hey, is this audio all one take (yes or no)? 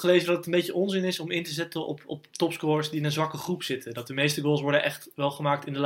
yes